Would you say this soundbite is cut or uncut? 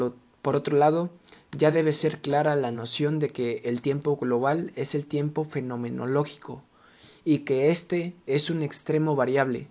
uncut